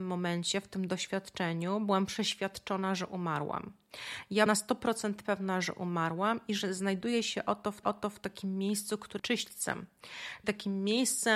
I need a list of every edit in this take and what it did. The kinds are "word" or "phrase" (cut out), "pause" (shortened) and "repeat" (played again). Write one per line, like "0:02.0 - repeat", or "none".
0:04.5 - word
0:07.8 - repeat
0:09.2 - phrase
0:10.4 - word